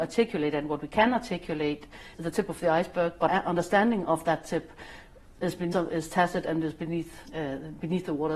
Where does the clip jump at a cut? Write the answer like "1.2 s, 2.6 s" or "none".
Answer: 2.1 s, 3.3 s, 5.7 s, 7.3 s

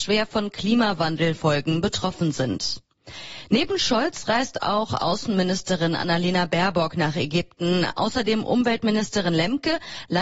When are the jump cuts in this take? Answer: none

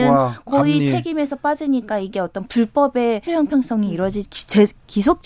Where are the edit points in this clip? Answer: 3.3 s, 4.2 s

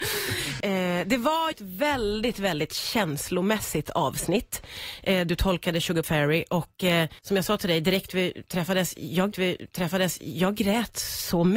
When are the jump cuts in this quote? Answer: 1.5 s, 6.0 s, 7.2 s, 9.3 s

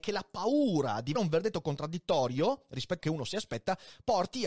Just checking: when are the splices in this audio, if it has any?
1.1 s, 3.0 s

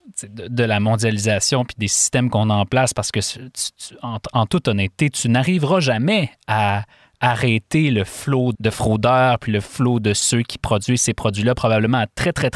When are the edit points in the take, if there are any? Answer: 8.5 s

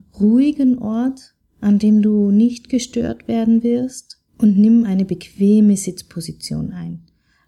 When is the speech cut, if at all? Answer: 4.3 s

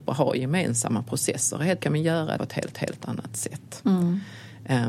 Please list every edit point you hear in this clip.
1.8 s, 2.4 s, 2.7 s

